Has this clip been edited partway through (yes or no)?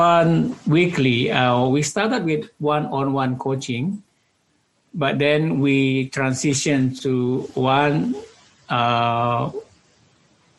no